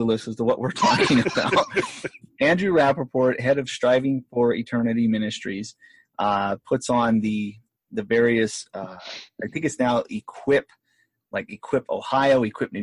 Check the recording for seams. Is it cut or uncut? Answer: uncut